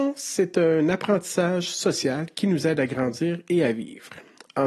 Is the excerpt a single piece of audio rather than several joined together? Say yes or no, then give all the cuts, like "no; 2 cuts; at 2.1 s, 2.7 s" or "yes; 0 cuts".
yes; 0 cuts